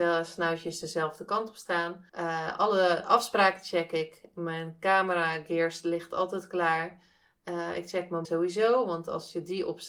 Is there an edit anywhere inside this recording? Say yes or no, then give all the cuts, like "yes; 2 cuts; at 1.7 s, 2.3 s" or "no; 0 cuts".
yes; 2 cuts; at 2.1 s, 8.2 s